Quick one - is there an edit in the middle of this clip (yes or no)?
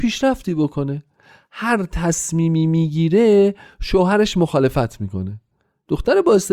no